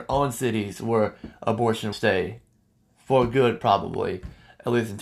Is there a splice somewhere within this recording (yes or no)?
yes